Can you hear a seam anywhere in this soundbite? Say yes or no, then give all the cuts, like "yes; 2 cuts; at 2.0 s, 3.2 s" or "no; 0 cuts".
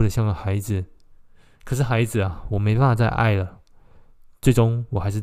no; 0 cuts